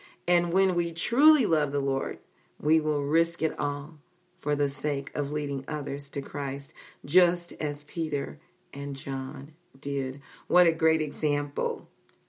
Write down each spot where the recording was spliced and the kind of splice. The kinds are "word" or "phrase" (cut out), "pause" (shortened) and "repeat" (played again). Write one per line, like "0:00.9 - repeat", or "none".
none